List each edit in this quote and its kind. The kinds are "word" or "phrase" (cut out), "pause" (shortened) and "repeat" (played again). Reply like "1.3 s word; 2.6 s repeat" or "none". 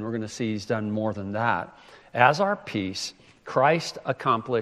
none